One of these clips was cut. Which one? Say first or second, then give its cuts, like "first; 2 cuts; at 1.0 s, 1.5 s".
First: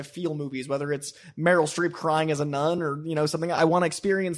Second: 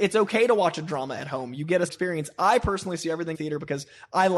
second; 2 cuts; at 1.9 s, 3.3 s